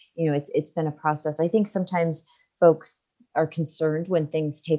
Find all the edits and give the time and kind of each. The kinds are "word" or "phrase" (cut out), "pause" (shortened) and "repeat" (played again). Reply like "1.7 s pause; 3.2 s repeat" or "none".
none